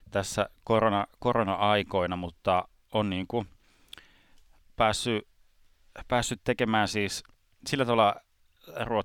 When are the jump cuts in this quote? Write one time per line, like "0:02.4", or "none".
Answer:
none